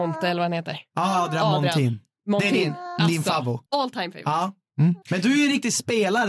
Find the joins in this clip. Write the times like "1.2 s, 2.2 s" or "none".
3.7 s, 5.0 s